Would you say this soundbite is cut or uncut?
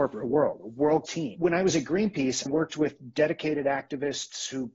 cut